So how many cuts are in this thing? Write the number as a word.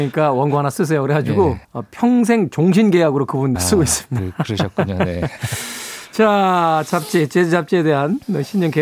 two